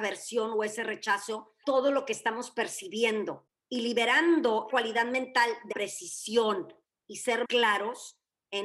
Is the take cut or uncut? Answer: cut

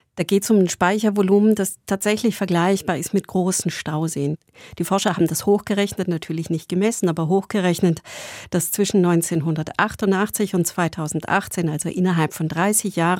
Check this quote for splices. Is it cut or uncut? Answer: uncut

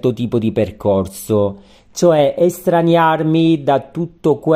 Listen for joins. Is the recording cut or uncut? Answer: uncut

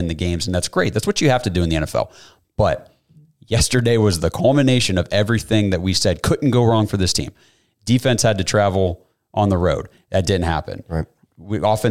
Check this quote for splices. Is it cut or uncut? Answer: uncut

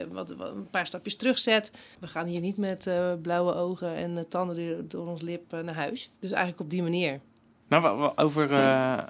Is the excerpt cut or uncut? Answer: cut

